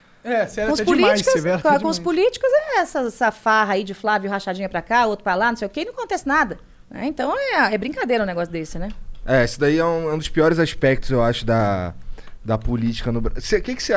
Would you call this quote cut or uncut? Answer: cut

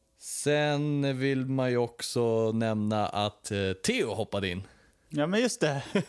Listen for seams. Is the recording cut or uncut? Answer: uncut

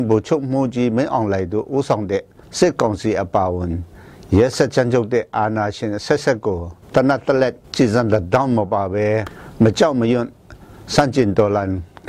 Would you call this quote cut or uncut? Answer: cut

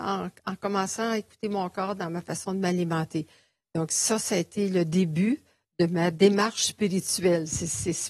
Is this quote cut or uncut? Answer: uncut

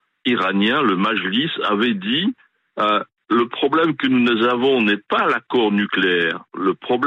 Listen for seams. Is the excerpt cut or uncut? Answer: uncut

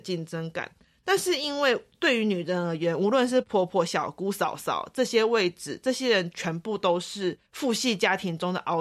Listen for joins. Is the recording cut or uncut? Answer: cut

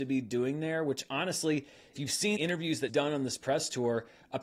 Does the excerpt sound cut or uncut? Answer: cut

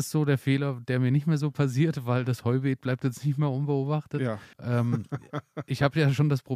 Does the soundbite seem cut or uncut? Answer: cut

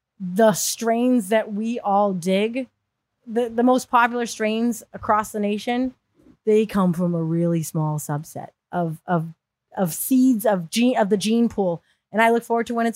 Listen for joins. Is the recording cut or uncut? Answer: uncut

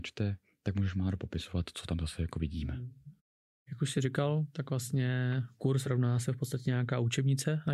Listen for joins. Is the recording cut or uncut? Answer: uncut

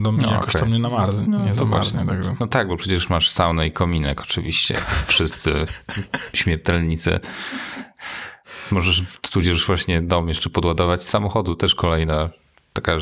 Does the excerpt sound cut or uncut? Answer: uncut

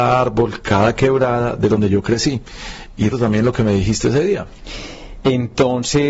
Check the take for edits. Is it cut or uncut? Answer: cut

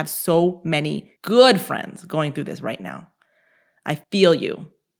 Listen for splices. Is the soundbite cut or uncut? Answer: cut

